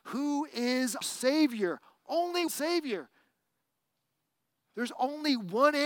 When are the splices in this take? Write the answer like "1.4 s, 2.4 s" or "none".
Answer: 1.0 s, 2.5 s